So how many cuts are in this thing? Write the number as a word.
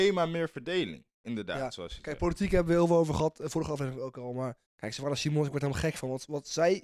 one